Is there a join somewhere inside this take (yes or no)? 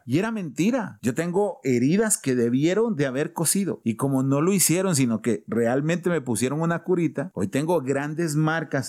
no